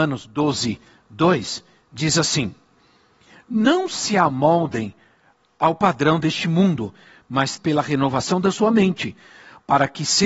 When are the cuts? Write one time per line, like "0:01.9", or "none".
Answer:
0:07.6